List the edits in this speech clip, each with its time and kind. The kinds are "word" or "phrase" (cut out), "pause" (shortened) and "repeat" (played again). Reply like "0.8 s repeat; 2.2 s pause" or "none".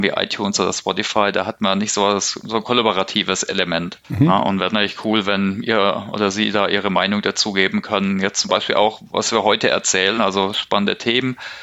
4.0 s pause